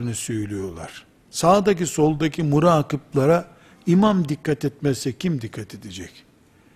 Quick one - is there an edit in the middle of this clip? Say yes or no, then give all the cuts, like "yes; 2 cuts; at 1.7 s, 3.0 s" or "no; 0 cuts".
no; 0 cuts